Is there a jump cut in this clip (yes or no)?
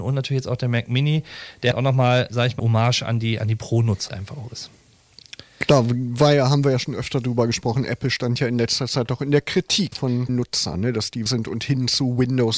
yes